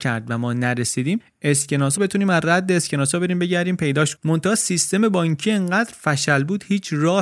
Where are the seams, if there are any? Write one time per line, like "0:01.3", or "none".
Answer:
0:02.0
0:04.2

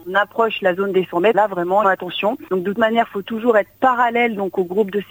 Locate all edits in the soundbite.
0:01.3
0:01.8
0:02.7

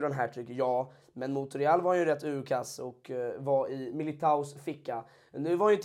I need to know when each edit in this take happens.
none

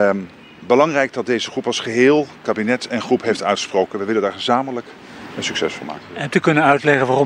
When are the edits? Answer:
none

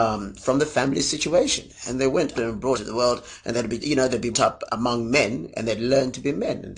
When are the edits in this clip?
0:02.3
0:02.7
0:03.8
0:04.3
0:04.7

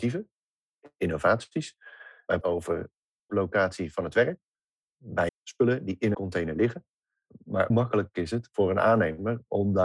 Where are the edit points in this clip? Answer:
0:02.4
0:03.3
0:05.3
0:06.1
0:07.7

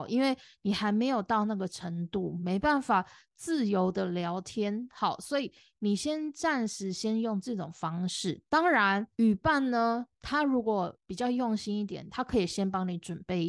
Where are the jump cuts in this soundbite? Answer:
0:08.5
0:09.1

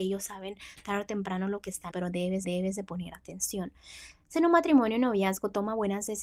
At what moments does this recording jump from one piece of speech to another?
0:01.9
0:02.4
0:04.3

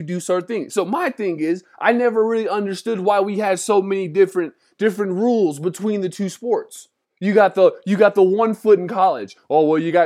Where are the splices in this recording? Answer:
0:07.0

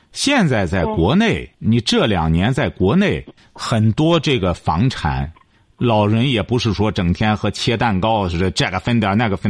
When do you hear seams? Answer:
0:01.5
0:03.4

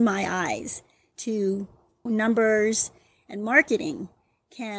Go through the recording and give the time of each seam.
0:02.1

